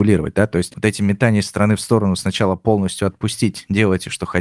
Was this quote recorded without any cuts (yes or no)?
yes